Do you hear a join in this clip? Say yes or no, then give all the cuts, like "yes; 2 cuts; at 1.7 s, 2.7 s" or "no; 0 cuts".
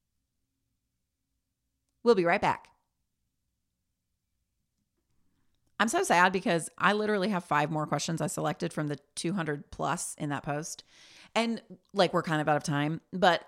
no; 0 cuts